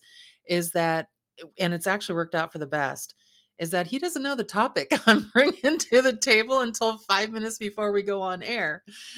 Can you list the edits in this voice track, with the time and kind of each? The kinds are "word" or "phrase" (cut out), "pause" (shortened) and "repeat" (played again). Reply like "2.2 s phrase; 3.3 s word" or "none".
none